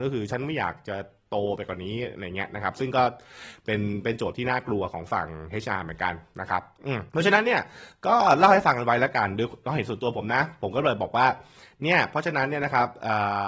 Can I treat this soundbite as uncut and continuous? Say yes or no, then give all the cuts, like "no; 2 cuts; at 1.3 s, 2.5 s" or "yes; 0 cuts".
no; 1 cut; at 7.1 s